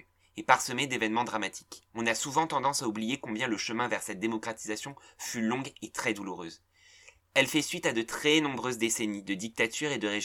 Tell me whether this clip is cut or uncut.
cut